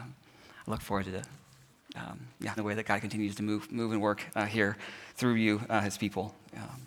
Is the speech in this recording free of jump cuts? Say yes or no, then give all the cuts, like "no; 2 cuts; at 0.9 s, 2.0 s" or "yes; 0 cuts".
no; 2 cuts; at 2.6 s, 5.1 s